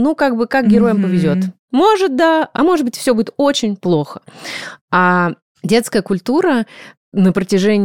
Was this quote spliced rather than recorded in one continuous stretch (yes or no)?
yes